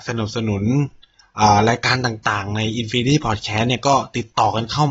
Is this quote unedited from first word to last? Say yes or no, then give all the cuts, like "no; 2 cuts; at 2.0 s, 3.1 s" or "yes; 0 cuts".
yes; 0 cuts